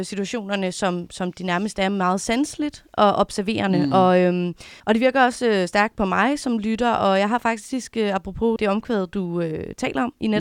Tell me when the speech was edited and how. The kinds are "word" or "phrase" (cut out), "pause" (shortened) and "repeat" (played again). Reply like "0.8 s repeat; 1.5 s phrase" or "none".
4.8 s pause